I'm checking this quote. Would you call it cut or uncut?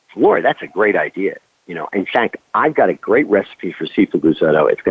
uncut